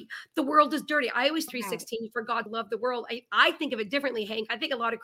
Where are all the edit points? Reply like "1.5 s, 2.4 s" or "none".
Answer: 1.5 s, 2.5 s